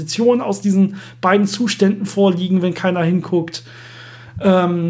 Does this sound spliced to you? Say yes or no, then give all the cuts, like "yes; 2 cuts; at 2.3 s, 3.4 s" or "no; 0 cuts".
no; 0 cuts